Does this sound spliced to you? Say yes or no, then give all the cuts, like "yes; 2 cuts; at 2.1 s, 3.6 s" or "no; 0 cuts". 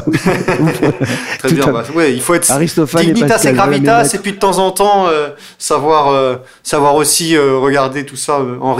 no; 0 cuts